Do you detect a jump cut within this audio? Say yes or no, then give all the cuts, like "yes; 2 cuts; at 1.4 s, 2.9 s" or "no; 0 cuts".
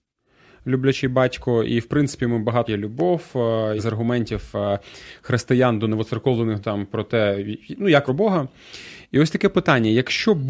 yes; 4 cuts; at 2.7 s, 3.8 s, 6.6 s, 8.1 s